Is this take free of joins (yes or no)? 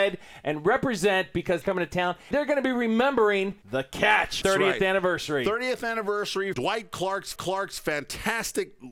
no